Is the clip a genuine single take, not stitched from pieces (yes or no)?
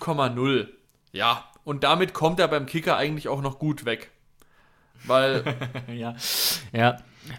yes